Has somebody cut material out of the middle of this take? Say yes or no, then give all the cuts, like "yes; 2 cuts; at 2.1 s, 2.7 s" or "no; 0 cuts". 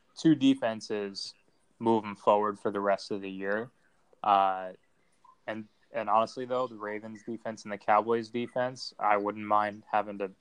no; 0 cuts